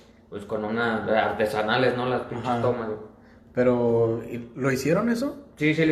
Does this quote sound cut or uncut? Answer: uncut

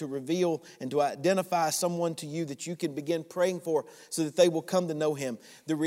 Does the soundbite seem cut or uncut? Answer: uncut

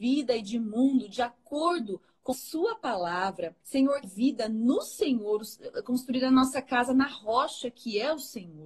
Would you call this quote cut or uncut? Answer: cut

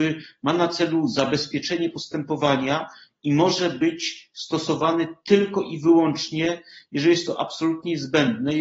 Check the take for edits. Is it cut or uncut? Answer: uncut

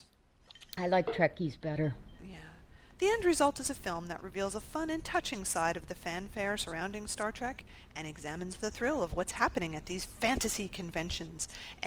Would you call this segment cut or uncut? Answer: uncut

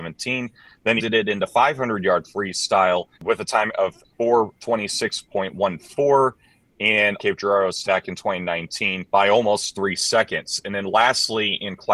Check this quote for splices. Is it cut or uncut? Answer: cut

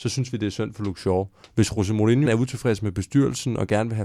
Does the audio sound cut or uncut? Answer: cut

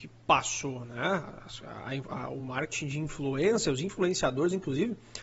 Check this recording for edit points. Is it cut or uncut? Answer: uncut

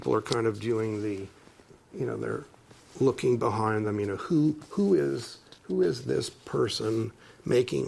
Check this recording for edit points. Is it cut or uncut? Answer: uncut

